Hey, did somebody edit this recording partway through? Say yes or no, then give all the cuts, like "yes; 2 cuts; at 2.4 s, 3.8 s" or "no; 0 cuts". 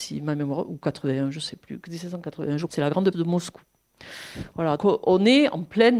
yes; 3 cuts; at 2.7 s, 3.1 s, 4.8 s